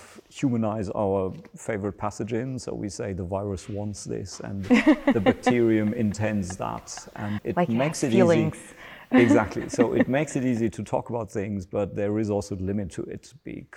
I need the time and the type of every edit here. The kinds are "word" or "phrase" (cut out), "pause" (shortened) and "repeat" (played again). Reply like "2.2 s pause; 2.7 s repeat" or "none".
7.4 s word